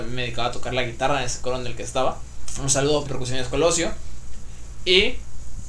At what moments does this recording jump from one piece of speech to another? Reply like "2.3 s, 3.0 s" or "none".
3.1 s